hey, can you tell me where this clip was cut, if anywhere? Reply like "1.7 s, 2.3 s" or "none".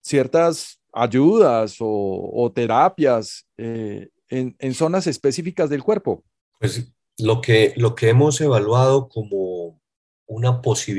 none